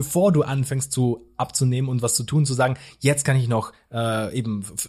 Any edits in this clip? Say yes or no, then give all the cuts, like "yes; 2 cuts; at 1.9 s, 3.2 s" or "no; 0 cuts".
no; 0 cuts